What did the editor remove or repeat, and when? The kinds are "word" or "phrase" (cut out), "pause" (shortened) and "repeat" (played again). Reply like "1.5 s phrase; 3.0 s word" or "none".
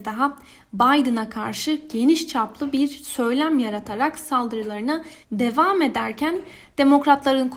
5.2 s pause